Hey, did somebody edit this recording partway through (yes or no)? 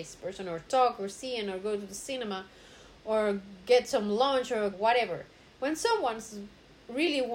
yes